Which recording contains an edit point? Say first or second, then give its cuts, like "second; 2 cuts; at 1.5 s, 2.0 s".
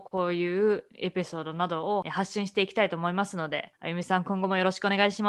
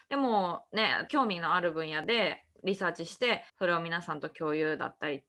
second; 1 cut; at 3.5 s